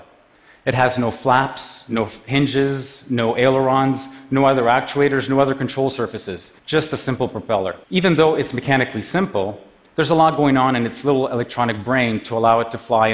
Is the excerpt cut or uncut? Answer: cut